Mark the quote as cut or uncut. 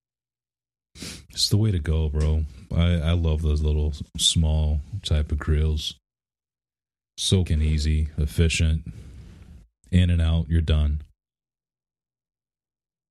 cut